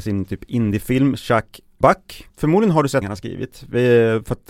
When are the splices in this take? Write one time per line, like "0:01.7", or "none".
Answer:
0:01.8
0:02.3
0:03.0